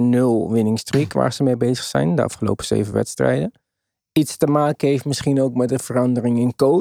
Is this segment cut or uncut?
uncut